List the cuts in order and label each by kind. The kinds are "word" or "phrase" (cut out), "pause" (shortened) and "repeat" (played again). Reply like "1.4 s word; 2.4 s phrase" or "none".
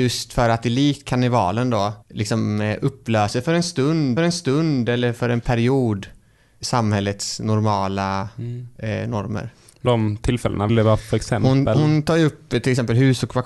2.0 s pause; 4.2 s repeat; 6.6 s word; 9.8 s phrase; 10.7 s phrase; 11.0 s word